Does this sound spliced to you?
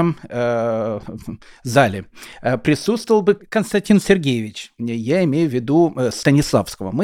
no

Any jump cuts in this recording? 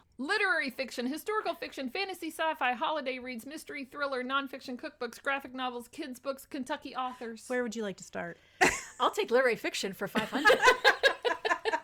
no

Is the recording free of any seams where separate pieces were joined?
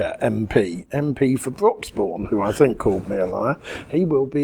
yes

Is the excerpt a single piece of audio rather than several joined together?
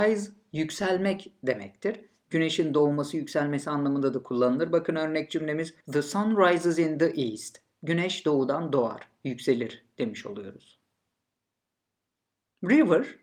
no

